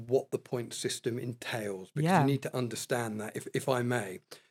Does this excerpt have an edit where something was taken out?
no; 0 cuts

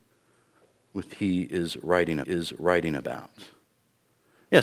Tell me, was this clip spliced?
yes; 2 cuts; at 1.1 s, 2.2 s

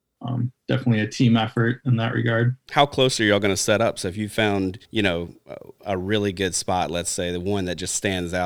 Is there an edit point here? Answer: yes; 1 cut; at 4.8 s

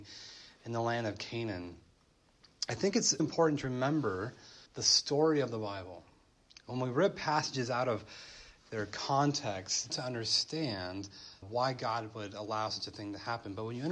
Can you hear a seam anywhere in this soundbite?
yes; 4 cuts; at 3.2 s, 4.7 s, 9.9 s, 11.4 s

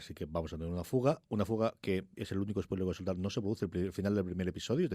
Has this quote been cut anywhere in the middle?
yes; 1 cut; at 2.1 s

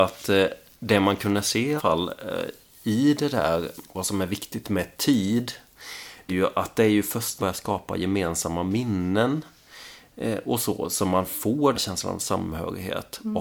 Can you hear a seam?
yes; 5 cuts; at 1.8 s, 3.8 s, 6.3 s, 7.4 s, 11.7 s

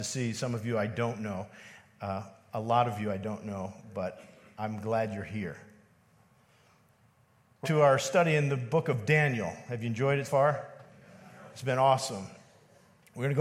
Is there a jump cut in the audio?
yes; 2 cuts; at 7.6 s, 10.2 s

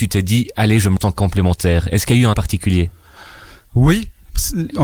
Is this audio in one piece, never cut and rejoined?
no; 2 cuts; at 1.0 s, 2.3 s

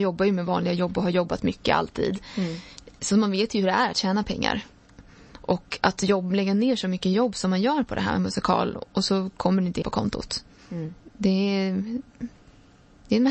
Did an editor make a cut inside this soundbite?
yes; 1 cut; at 9.8 s

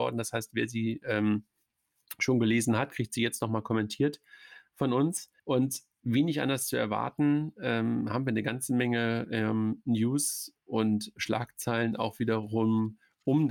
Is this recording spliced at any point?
yes; 1 cut; at 5.4 s

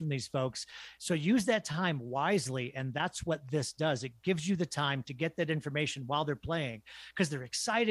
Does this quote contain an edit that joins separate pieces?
no; 0 cuts

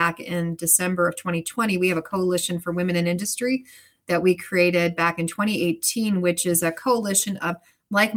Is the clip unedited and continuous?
yes; 0 cuts

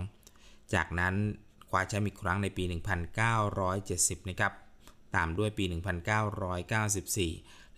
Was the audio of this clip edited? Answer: no; 0 cuts

